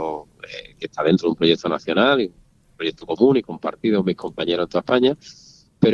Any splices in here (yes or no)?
no